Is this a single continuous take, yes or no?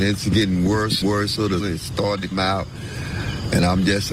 no